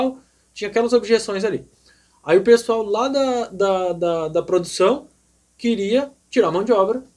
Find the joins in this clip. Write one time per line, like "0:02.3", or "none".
none